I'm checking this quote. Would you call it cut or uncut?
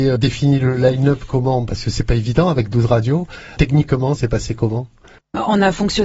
cut